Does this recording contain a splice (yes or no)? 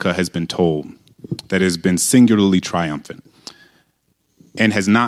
no